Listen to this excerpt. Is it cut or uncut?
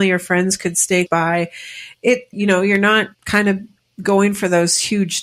cut